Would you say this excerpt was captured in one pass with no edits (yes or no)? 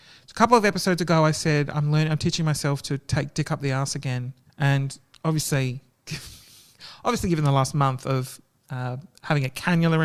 no